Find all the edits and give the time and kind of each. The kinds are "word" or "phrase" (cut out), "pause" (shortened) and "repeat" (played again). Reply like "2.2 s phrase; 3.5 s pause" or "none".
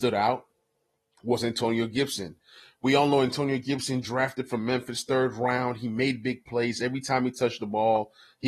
none